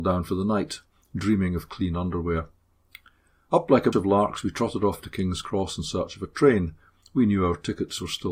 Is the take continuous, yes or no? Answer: no